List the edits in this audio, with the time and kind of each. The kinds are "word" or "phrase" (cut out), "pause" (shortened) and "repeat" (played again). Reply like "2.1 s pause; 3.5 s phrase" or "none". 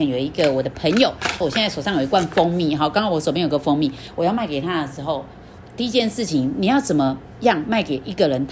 1.4 s phrase